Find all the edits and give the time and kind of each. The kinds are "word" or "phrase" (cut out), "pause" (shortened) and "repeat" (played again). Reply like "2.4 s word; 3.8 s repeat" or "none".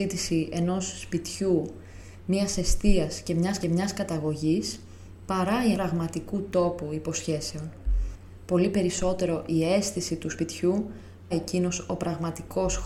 3.6 s repeat; 5.7 s phrase; 11.3 s word